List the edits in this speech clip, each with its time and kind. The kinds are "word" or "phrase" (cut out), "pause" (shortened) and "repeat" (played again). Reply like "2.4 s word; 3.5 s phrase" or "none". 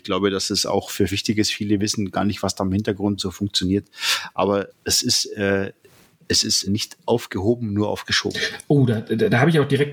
1.1 s phrase; 3.2 s phrase; 4.7 s word; 6.6 s word